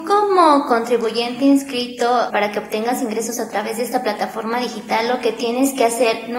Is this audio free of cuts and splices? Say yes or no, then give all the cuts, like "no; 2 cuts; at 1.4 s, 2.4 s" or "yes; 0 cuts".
no; 1 cut; at 2.3 s